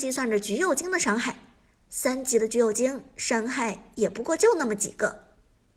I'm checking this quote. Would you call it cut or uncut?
uncut